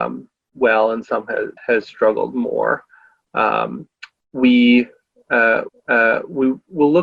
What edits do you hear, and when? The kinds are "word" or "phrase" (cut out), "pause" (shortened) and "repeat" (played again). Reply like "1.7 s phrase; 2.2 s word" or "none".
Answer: 1.6 s pause; 5.7 s repeat

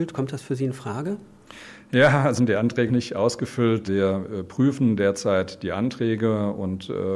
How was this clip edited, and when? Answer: 2.4 s word; 2.9 s word; 3.9 s word

